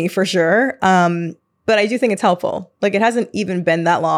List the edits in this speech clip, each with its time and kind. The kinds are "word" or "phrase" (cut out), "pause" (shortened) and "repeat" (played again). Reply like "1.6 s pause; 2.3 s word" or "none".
none